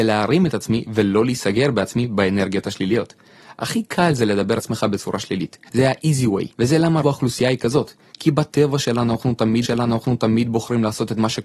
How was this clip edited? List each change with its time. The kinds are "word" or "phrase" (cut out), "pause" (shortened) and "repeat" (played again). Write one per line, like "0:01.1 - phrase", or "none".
0:04.6 - word
0:05.7 - pause
0:06.5 - pause
0:07.0 - word
0:09.6 - repeat